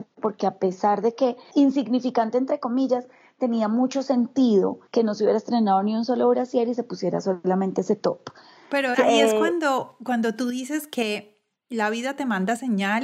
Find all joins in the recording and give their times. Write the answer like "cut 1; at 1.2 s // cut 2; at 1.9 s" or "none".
cut 1; at 1.5 s // cut 2; at 4.9 s // cut 3; at 8.9 s

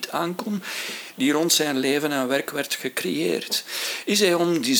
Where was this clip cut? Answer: none

